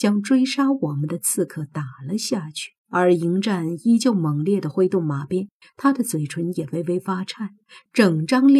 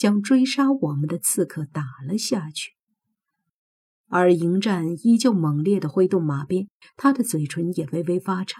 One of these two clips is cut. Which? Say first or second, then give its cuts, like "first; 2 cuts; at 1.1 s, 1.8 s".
first; 1 cut; at 2.8 s